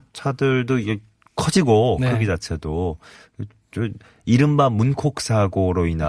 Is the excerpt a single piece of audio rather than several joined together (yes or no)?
yes